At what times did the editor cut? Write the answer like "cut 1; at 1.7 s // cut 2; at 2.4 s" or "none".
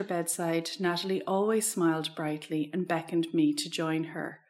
none